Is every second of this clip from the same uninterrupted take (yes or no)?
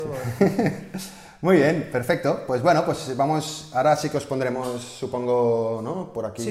yes